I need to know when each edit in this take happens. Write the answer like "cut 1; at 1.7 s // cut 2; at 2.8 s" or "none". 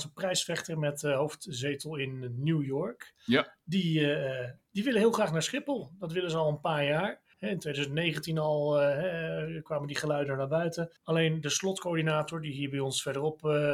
cut 1; at 7.3 s // cut 2; at 11.0 s